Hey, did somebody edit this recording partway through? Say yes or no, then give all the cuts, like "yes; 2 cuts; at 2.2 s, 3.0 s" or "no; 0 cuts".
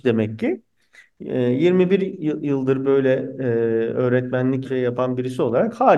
yes; 1 cut; at 4.6 s